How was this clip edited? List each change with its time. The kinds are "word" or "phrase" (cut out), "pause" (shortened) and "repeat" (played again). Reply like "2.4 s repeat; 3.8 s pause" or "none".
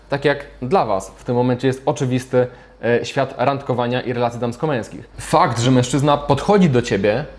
none